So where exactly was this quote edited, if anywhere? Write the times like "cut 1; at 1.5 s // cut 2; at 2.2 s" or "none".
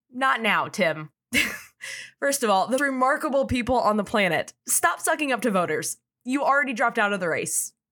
cut 1; at 1.1 s // cut 2; at 2.8 s // cut 3; at 4.6 s